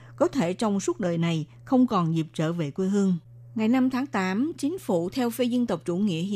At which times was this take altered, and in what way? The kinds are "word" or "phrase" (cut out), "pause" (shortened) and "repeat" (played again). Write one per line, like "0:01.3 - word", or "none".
none